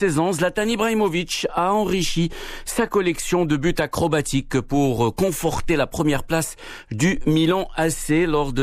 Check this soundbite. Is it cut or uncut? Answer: uncut